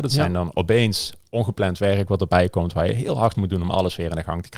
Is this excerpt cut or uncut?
cut